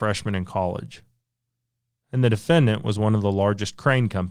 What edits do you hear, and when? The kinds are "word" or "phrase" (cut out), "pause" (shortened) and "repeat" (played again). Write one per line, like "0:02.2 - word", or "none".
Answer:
none